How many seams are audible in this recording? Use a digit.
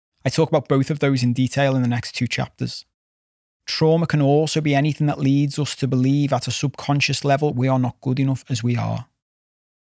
0